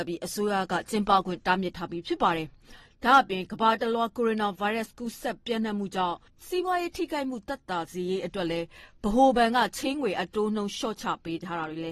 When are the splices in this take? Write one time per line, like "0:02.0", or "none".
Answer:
none